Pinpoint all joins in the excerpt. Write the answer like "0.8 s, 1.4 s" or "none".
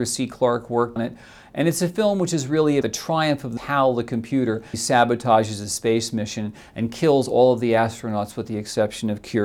1.0 s, 2.8 s, 3.6 s, 4.7 s

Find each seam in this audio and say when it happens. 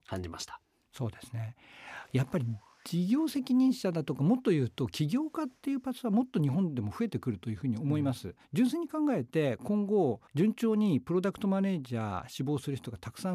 8.4 s, 10.3 s

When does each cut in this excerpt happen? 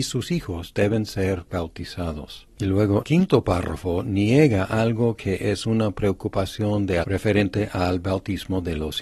3.0 s, 7.0 s

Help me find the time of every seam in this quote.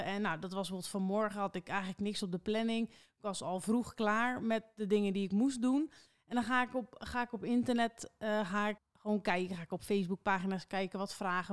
8.8 s

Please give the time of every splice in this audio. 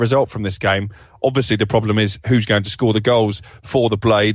none

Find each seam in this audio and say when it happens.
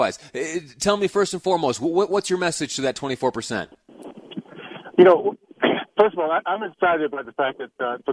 none

